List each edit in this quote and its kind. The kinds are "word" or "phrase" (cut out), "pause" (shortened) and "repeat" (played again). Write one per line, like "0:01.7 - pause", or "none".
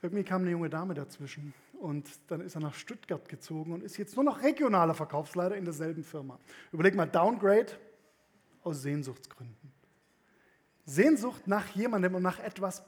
none